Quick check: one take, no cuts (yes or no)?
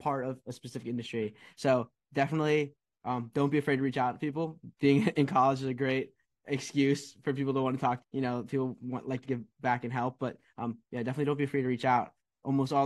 no